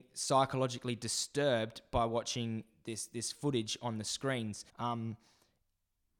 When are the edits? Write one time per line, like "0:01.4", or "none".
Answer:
0:04.7